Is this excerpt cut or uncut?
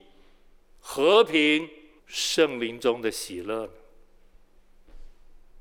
cut